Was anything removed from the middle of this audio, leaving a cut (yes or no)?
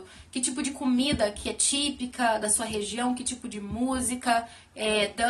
no